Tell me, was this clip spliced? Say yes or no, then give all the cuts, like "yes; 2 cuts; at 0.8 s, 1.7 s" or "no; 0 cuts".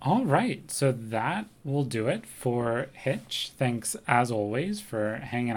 no; 0 cuts